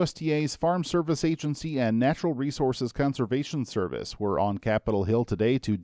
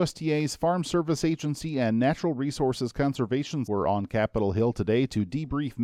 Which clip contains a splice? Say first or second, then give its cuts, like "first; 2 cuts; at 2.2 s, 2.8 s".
second; 1 cut; at 3.7 s